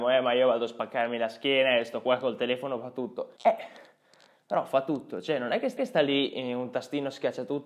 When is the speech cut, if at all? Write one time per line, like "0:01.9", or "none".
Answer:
0:03.4
0:05.8